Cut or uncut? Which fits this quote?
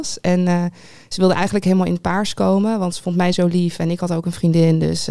uncut